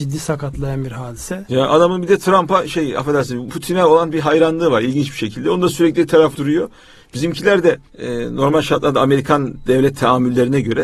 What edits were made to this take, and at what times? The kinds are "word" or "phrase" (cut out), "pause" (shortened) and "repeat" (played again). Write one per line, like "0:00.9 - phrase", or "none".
0:06.3 - word
0:07.9 - pause